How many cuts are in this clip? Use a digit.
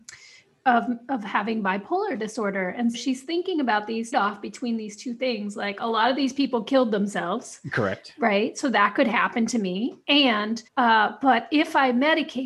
3